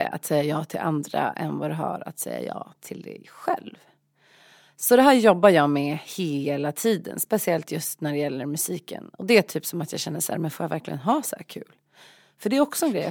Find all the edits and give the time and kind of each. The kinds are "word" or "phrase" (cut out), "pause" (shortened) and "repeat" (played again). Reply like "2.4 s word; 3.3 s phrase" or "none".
none